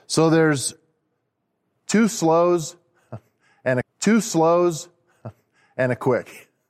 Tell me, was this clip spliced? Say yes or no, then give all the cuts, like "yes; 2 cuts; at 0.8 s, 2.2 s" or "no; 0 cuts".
yes; 1 cut; at 3.8 s